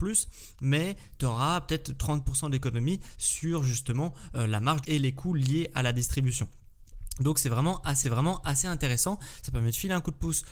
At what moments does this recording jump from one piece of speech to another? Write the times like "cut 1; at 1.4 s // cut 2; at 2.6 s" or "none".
cut 1; at 4.8 s // cut 2; at 8.0 s